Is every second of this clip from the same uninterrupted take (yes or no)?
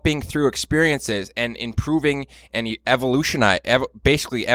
yes